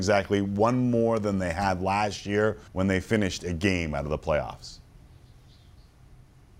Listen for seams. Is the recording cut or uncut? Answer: cut